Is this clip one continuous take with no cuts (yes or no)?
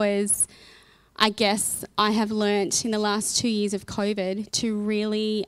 yes